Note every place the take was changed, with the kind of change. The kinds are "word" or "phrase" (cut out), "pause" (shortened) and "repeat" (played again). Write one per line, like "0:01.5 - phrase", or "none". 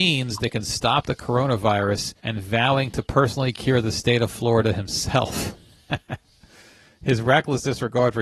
0:02.2 - pause